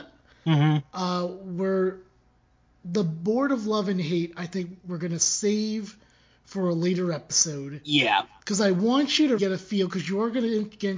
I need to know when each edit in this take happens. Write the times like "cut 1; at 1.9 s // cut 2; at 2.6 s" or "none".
cut 1; at 9.4 s